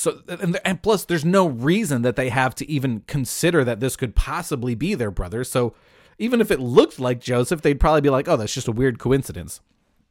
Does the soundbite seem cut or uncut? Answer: uncut